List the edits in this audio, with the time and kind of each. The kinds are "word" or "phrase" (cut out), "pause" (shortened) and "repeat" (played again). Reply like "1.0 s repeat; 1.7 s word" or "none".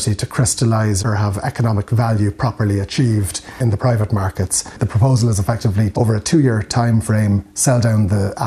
1.0 s word; 5.9 s word